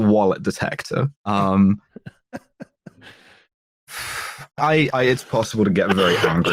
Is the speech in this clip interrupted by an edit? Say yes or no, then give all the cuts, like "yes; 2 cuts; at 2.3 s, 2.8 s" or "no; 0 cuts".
yes; 3 cuts; at 1.2 s, 4.6 s, 4.9 s